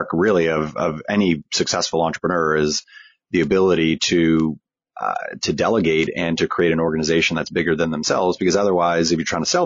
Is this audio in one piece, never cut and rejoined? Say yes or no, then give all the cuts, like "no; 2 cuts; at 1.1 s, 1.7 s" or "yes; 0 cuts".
yes; 0 cuts